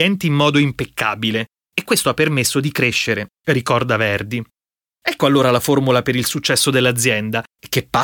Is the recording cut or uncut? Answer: uncut